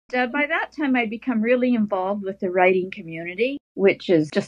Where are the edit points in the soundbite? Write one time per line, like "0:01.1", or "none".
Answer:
none